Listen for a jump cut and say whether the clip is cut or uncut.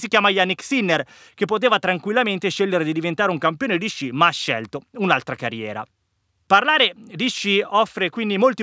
uncut